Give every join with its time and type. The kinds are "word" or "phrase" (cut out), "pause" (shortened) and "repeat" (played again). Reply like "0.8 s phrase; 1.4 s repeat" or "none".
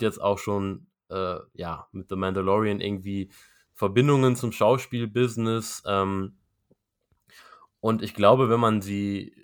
none